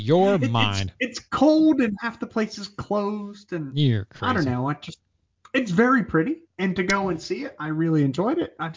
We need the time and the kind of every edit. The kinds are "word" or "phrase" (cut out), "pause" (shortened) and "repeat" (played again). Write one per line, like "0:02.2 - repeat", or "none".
0:06.5 - pause